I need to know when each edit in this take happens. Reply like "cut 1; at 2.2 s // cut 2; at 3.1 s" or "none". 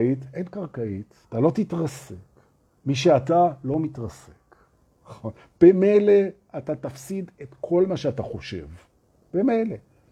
cut 1; at 1.2 s